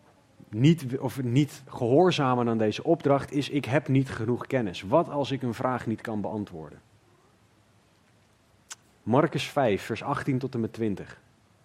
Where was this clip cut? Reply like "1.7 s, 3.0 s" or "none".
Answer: 8.8 s